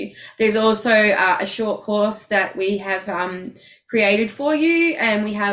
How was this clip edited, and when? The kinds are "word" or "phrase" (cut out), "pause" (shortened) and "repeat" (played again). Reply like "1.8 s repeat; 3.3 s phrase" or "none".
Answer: none